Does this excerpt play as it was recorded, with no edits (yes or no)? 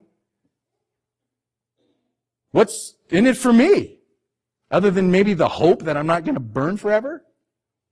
yes